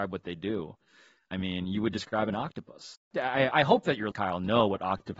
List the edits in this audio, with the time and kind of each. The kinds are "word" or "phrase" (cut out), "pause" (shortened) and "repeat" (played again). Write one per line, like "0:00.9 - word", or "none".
0:04.1 - word